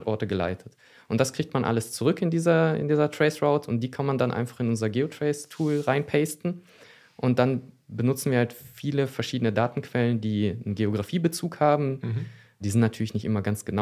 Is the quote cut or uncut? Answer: uncut